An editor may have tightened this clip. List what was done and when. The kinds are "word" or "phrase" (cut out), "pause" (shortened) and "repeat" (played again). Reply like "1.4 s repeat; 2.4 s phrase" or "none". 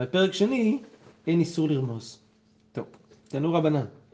none